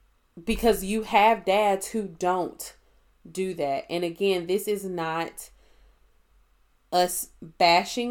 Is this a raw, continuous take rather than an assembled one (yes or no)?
yes